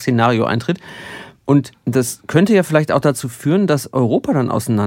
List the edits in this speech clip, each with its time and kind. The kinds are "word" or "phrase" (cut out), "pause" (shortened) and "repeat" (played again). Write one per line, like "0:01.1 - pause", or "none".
0:01.8 - pause